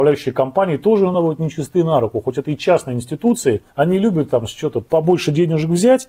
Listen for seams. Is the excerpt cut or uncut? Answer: uncut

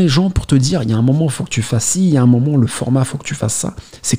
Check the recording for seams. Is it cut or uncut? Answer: uncut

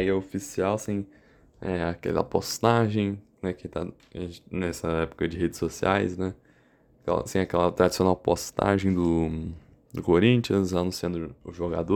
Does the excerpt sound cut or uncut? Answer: uncut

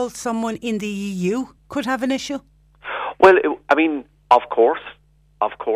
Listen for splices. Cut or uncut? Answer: uncut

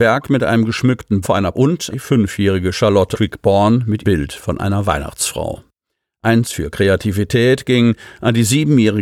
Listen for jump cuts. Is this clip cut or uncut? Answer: cut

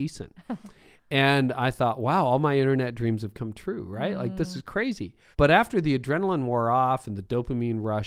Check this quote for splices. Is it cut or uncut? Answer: cut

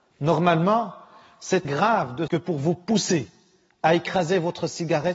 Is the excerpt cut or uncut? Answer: cut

